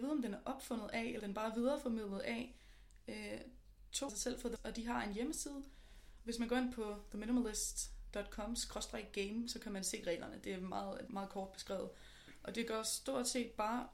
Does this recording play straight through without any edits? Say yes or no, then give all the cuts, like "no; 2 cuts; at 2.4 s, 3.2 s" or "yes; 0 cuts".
no; 4 cuts; at 1.2 s, 4.1 s, 4.6 s, 11.1 s